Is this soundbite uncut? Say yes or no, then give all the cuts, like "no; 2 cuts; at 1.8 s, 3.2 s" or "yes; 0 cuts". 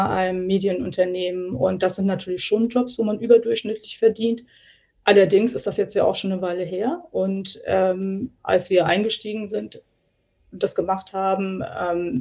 yes; 0 cuts